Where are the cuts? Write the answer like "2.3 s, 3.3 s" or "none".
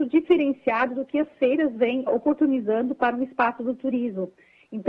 2.1 s